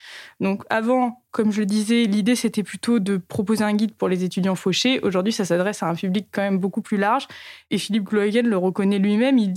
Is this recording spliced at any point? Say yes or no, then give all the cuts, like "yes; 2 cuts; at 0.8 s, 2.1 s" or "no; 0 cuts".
no; 0 cuts